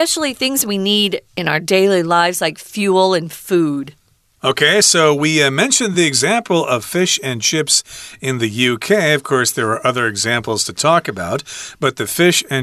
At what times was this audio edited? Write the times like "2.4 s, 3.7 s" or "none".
none